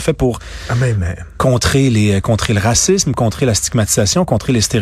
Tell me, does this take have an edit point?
no; 0 cuts

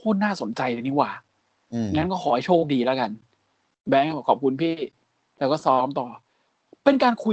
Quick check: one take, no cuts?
yes; 0 cuts

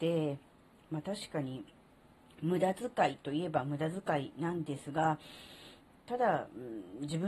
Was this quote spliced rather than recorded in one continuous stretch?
no; 0 cuts

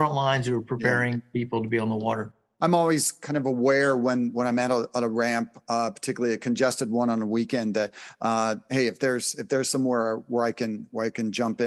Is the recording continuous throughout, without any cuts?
yes; 0 cuts

